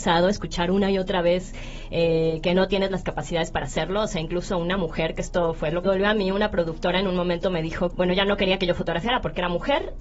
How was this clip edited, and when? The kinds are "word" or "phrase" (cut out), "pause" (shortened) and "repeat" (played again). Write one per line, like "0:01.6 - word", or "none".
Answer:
0:05.8 - phrase
0:07.9 - word